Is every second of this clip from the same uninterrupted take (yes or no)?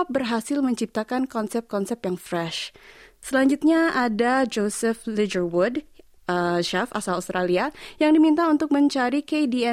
yes